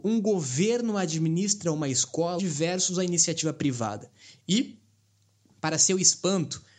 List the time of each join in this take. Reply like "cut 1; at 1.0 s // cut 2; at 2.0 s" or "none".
cut 1; at 2.4 s

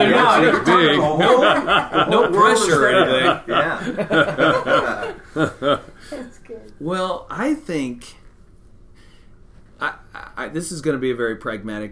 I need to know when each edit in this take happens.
none

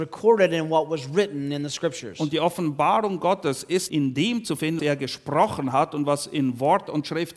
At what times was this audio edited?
cut 1; at 3.9 s // cut 2; at 4.8 s

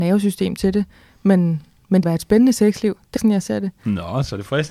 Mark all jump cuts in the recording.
cut 1; at 2.0 s // cut 2; at 3.2 s

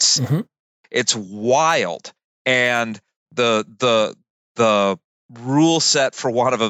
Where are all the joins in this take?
none

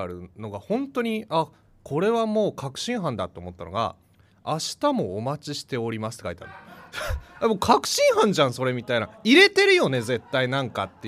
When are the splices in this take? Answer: cut 1; at 4.0 s

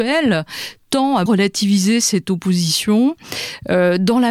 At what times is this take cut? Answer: cut 1; at 1.3 s

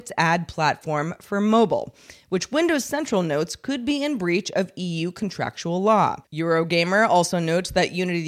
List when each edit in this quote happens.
cut 1; at 6.3 s

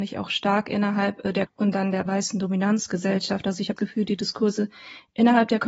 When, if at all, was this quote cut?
cut 1; at 1.5 s // cut 2; at 2.1 s // cut 3; at 3.8 s

